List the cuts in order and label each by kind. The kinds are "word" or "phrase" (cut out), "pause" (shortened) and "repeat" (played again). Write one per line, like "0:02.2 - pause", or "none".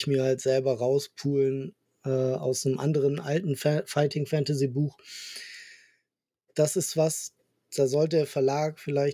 none